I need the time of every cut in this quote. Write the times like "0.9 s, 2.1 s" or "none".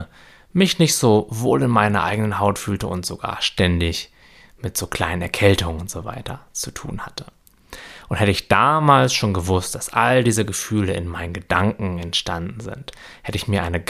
none